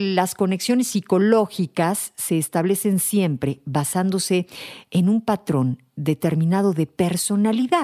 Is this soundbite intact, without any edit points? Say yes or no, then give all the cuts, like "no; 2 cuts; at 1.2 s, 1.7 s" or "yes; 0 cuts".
yes; 0 cuts